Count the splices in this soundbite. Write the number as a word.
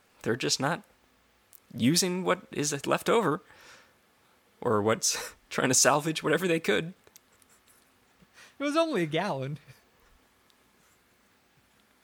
one